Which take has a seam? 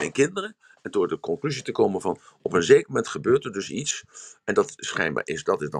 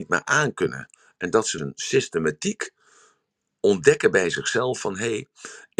second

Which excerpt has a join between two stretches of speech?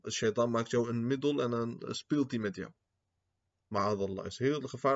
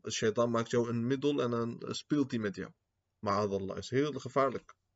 second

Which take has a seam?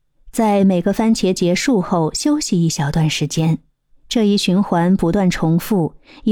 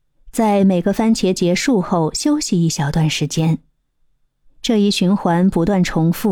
first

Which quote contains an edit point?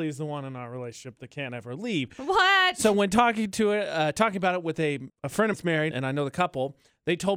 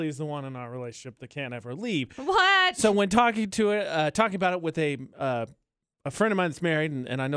first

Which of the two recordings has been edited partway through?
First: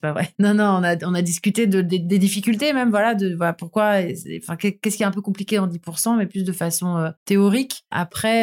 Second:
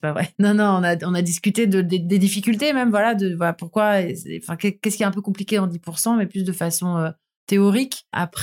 first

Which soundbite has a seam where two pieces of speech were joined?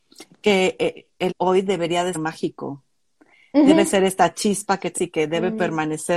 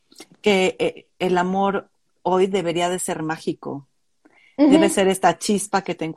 first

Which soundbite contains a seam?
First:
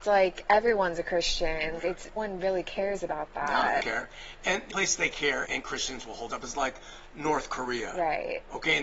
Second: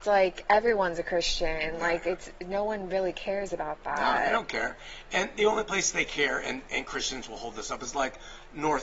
first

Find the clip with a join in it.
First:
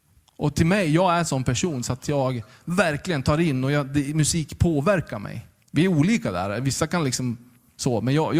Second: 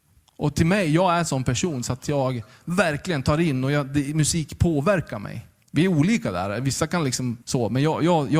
second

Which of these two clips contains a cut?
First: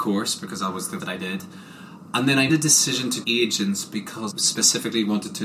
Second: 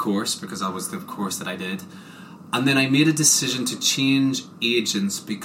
first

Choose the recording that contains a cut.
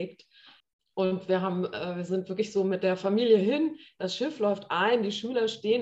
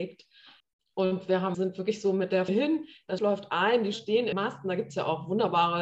second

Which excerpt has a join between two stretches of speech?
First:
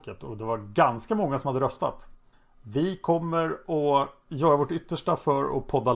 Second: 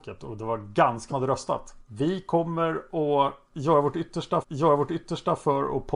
second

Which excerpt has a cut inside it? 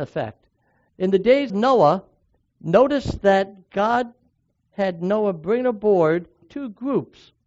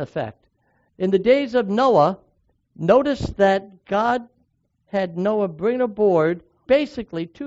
first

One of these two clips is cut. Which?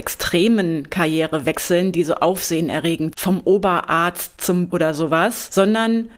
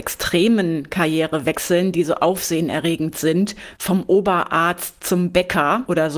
first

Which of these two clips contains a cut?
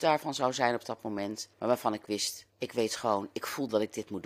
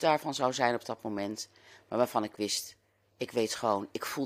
first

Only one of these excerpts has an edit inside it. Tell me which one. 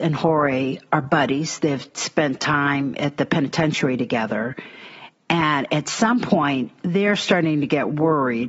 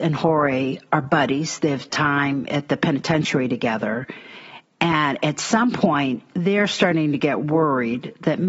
second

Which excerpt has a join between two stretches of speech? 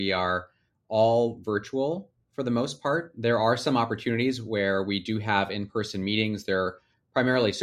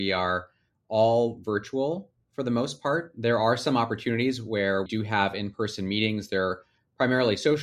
second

